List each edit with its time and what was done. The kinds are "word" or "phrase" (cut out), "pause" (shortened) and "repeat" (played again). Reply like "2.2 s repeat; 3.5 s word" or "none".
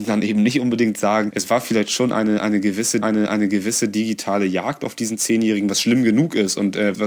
3.0 s repeat

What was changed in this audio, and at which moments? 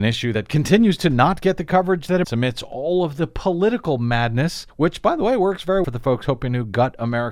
2.2 s word; 4.7 s pause; 5.8 s word

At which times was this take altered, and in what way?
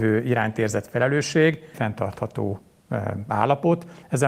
1.7 s phrase

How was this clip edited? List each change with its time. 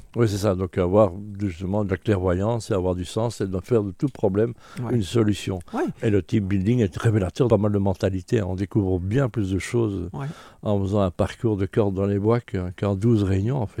7.5 s phrase; 12.4 s word

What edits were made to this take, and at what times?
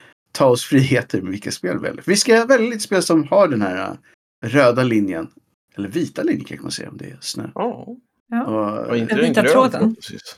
none

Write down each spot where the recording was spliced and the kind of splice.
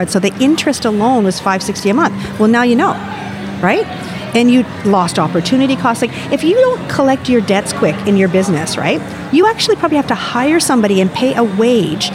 none

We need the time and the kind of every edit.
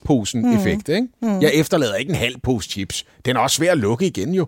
none

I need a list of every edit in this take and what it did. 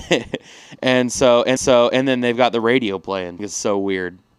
1.6 s repeat; 3.4 s phrase

